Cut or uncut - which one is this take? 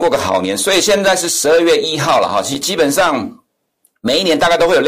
uncut